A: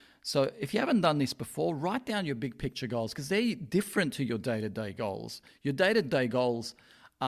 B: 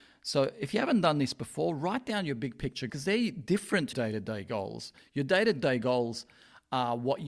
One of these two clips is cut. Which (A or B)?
B